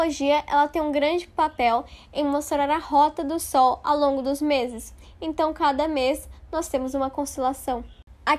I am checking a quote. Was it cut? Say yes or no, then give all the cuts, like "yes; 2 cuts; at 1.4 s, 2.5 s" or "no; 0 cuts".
no; 0 cuts